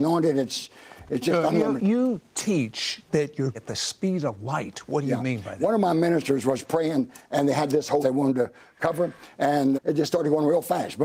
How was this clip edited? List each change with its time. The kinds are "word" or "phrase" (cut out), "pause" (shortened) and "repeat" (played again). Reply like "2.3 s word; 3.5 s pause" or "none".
1.8 s word; 3.5 s word; 8.0 s word; 9.7 s word